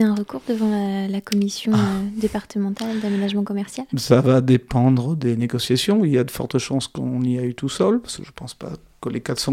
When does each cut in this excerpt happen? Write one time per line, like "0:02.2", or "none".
none